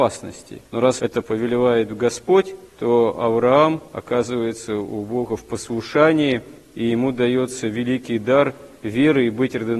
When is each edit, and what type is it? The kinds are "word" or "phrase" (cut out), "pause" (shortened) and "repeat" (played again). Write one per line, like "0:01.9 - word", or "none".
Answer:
0:03.9 - pause
0:08.8 - pause